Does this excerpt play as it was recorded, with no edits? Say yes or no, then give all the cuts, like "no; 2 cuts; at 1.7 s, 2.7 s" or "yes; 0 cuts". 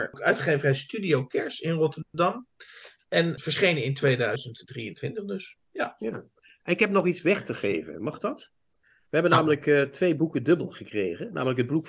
yes; 0 cuts